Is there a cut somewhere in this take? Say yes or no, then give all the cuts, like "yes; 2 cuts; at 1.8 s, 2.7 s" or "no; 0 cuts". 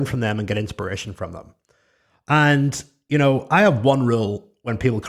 no; 0 cuts